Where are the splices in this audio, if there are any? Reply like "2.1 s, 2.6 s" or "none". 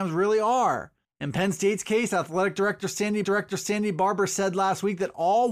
1.0 s, 3.2 s